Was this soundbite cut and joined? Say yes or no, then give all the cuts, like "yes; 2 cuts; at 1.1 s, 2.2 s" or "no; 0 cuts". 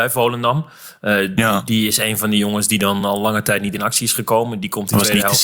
no; 0 cuts